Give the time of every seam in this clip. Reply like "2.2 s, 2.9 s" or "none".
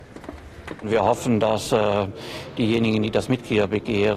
none